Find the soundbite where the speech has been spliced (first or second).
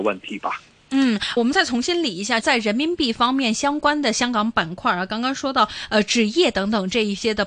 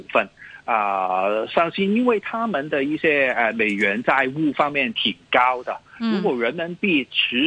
first